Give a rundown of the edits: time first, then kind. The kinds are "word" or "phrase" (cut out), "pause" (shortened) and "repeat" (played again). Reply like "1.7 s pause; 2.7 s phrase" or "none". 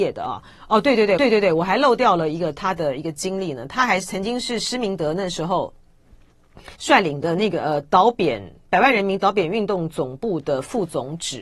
1.2 s repeat; 6.7 s pause